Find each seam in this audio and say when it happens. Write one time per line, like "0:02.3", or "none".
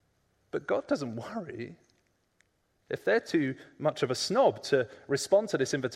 none